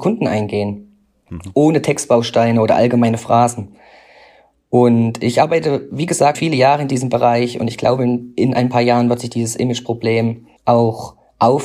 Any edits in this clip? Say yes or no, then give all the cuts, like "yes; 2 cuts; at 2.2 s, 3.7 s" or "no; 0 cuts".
yes; 2 cuts; at 6.3 s, 10.6 s